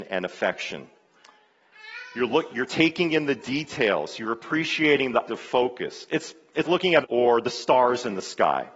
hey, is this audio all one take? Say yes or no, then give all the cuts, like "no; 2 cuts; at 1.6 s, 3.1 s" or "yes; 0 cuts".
no; 4 cuts; at 2.5 s, 5.3 s, 6.6 s, 7.0 s